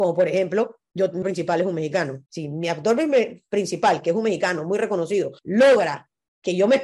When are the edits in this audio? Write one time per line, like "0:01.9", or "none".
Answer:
0:01.2
0:02.3
0:05.4